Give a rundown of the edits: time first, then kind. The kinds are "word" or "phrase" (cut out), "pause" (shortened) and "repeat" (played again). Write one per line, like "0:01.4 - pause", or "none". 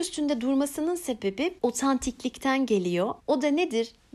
0:01.6 - word
0:03.2 - pause